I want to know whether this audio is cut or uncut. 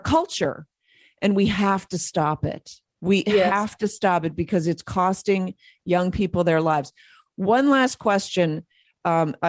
cut